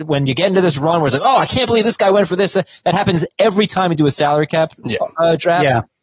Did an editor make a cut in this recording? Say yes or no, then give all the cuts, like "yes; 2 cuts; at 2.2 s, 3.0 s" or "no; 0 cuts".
no; 0 cuts